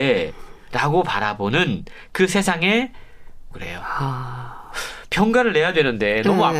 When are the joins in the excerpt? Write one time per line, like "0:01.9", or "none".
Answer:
0:03.5